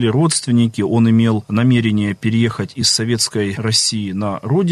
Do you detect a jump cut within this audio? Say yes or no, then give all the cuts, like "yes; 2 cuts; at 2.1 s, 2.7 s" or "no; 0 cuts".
no; 0 cuts